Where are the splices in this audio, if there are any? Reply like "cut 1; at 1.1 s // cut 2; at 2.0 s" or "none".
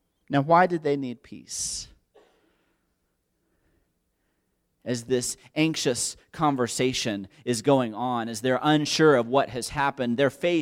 none